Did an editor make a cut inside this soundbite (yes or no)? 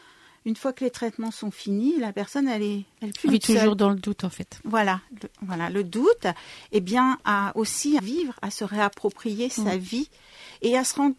yes